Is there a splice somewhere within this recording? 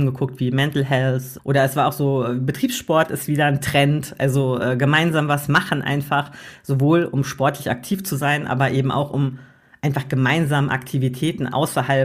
no; 0 cuts

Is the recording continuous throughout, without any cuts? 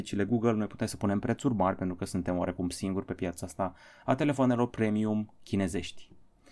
yes; 0 cuts

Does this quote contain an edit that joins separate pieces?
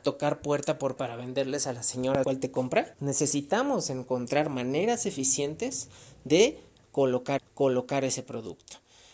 yes; 4 cuts; at 1.0 s, 2.2 s, 2.9 s, 7.4 s

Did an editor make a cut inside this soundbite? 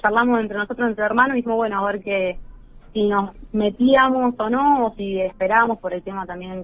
no; 0 cuts

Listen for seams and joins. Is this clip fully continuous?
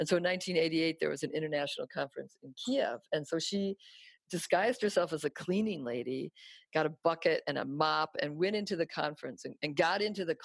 yes; 0 cuts

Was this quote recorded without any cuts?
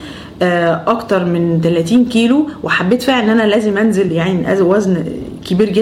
yes; 0 cuts

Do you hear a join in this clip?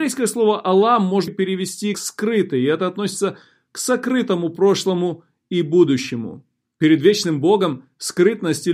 yes; 2 cuts; at 1.3 s, 1.9 s

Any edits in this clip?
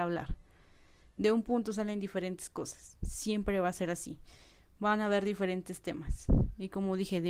no; 0 cuts

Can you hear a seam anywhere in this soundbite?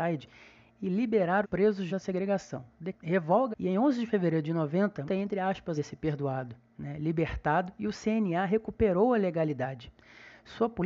yes; 6 cuts; at 1.4 s, 1.9 s, 2.9 s, 3.5 s, 5.1 s, 5.8 s

